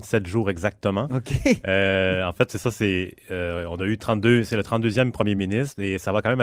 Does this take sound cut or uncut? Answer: uncut